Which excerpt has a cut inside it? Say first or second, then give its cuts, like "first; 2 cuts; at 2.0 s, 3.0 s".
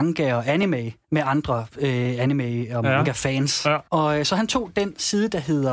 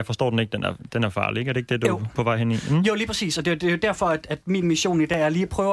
first; 2 cuts; at 1.0 s, 3.8 s